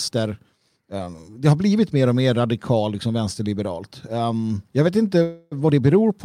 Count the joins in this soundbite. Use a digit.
1